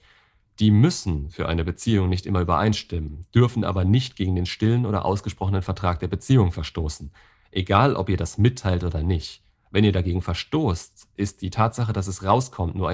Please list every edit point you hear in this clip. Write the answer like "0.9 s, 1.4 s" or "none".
none